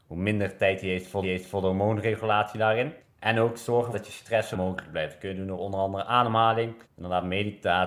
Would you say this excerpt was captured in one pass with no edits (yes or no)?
no